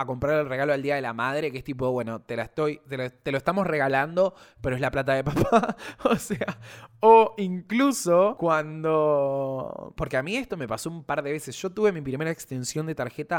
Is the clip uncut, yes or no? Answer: yes